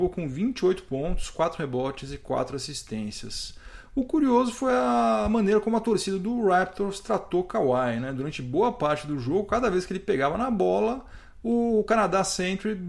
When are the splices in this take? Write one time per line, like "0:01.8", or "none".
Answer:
none